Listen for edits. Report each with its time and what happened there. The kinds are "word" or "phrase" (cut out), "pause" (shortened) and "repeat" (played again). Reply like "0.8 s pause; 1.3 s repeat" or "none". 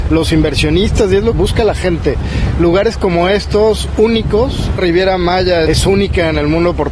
1.3 s word; 4.8 s phrase; 5.7 s word